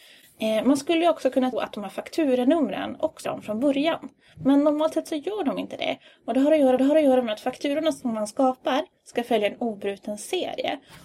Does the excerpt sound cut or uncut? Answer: cut